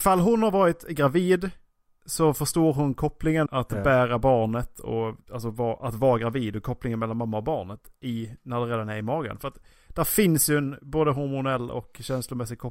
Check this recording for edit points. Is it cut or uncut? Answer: cut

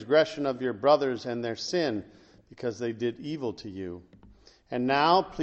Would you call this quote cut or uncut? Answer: uncut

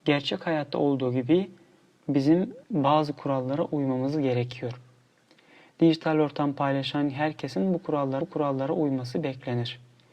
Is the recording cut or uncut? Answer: cut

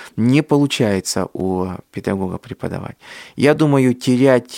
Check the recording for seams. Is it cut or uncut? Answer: uncut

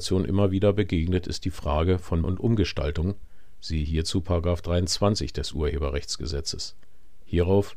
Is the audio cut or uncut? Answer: cut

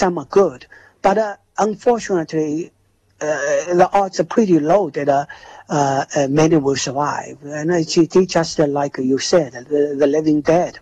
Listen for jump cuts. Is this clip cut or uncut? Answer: uncut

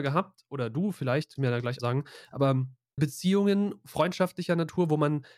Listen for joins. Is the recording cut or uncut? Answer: cut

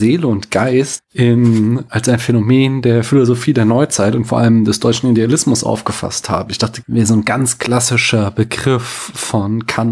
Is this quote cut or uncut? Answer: cut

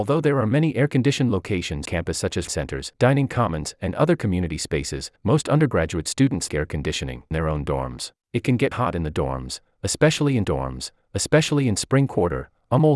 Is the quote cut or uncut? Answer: cut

